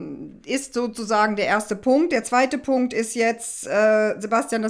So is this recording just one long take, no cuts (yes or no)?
yes